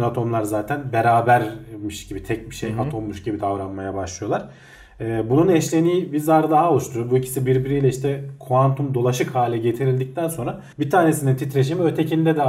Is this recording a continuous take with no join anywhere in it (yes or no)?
no